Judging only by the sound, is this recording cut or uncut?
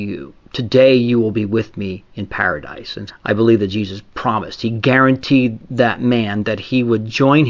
cut